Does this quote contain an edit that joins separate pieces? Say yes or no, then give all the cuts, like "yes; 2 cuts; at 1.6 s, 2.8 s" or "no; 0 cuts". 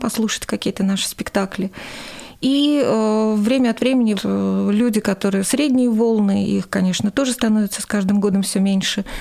yes; 2 cuts; at 4.2 s, 5.4 s